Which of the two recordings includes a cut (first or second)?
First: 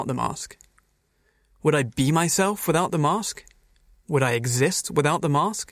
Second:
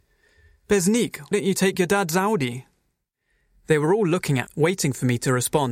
second